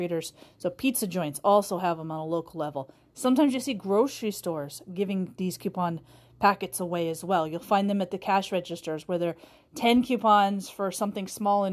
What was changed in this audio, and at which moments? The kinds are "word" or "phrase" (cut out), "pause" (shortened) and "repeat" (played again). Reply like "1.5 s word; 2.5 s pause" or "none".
none